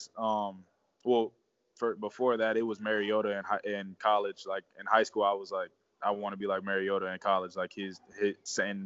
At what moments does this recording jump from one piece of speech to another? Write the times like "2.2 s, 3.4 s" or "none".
none